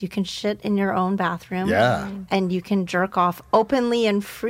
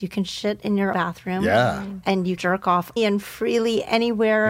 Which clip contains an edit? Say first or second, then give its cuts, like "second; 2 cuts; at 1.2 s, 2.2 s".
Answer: second; 3 cuts; at 0.9 s, 2.4 s, 3.0 s